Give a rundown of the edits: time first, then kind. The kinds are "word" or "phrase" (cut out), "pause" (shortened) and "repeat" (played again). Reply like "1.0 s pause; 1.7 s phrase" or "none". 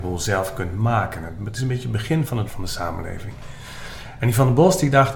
2.5 s word